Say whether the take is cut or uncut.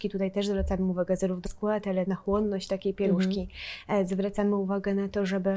cut